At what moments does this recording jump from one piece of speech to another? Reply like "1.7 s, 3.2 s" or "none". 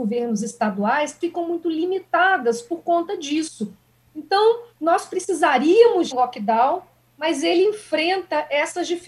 1.2 s, 4.7 s, 6.1 s

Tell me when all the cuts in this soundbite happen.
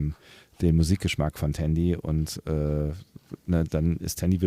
none

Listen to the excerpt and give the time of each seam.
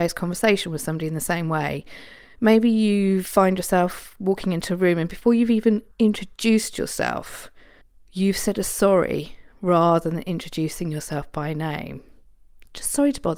5.9 s, 7.8 s

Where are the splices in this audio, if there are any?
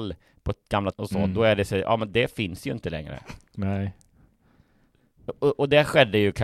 0.9 s

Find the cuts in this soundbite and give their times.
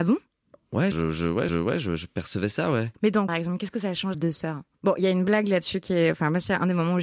0.9 s, 1.5 s, 2.9 s, 3.3 s, 4.1 s

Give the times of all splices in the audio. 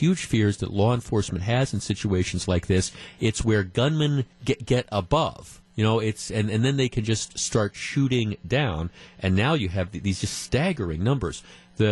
4.3 s, 5.6 s

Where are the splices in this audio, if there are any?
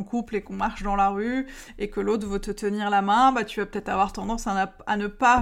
none

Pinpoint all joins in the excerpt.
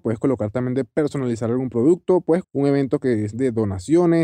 2.4 s

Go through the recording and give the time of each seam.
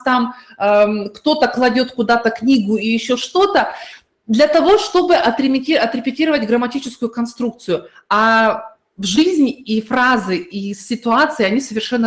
none

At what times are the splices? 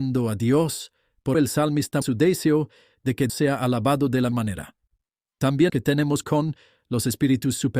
1.3 s, 2.0 s, 3.3 s, 4.3 s, 5.7 s, 6.2 s

